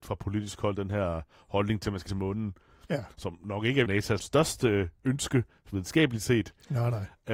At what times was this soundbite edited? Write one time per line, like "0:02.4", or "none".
0:02.1
0:03.9
0:04.2